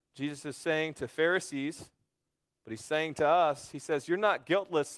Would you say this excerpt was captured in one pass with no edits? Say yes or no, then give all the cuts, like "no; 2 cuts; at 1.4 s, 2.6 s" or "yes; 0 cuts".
yes; 0 cuts